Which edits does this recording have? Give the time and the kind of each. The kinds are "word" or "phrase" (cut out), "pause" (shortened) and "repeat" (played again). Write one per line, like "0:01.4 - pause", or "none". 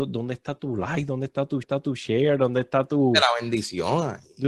0:01.6 - repeat